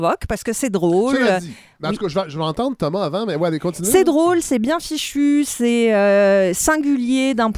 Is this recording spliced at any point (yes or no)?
no